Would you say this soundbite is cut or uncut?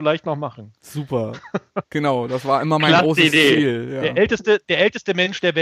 uncut